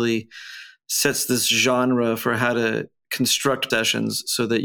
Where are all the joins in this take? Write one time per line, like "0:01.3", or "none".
0:03.7